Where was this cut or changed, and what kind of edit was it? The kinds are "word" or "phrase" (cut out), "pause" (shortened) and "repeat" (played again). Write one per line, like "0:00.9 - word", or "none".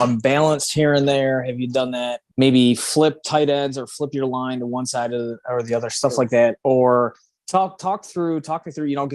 none

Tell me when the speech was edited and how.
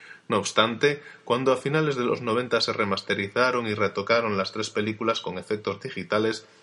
none

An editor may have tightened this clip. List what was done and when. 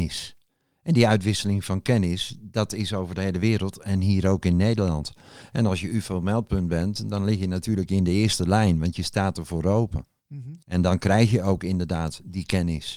0:10.6 - pause

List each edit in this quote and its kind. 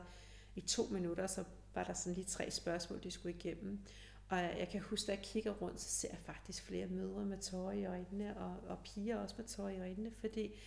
none

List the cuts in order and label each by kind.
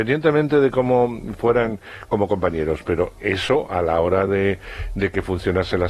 none

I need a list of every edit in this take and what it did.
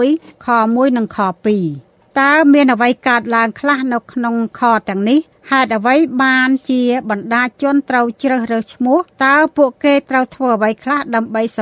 0:05.3 - pause
0:09.1 - pause

